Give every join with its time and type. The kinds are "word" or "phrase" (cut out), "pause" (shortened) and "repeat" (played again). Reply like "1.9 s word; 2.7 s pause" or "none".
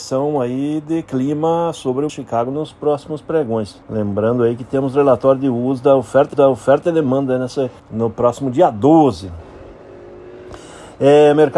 2.1 s word; 3.8 s pause; 6.3 s repeat; 7.8 s pause